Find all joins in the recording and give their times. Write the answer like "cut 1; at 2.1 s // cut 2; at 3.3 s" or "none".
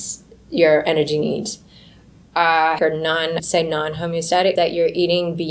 cut 1; at 2.8 s // cut 2; at 3.4 s // cut 3; at 4.6 s